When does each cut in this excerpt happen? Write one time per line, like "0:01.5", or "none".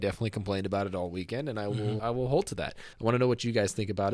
0:02.0
0:02.9